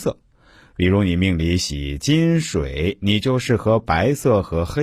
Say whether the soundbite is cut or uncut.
uncut